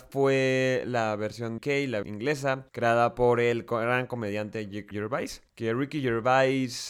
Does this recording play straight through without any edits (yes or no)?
no